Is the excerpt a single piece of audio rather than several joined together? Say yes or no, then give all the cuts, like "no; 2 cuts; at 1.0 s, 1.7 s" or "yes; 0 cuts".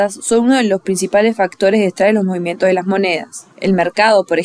no; 1 cut; at 3.5 s